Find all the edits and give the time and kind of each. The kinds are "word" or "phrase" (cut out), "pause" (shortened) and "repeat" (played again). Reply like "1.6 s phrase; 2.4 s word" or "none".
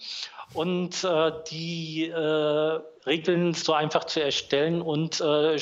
3.0 s pause; 3.6 s word